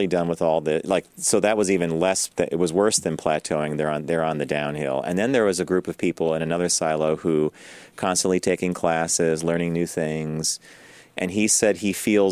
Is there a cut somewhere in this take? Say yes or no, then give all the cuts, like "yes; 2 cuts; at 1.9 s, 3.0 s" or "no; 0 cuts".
no; 0 cuts